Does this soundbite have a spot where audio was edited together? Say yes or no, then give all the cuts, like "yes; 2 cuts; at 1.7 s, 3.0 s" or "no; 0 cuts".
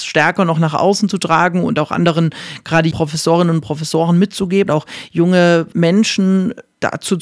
yes; 3 cuts; at 2.9 s, 4.7 s, 5.7 s